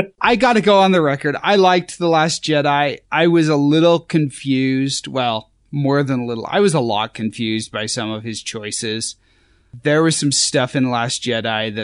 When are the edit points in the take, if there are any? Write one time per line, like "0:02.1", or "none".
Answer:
0:03.0
0:05.6